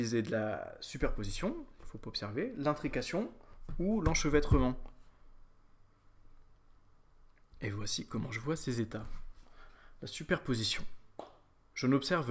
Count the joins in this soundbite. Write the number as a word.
zero